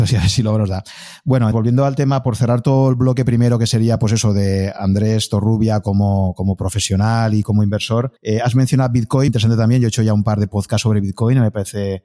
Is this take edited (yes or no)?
yes